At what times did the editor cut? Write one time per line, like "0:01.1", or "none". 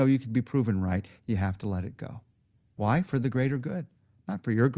none